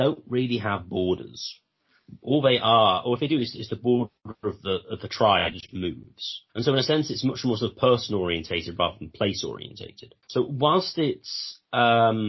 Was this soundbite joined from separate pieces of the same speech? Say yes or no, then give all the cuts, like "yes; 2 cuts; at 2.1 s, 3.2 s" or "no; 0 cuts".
yes; 2 cuts; at 6.5 s, 10.2 s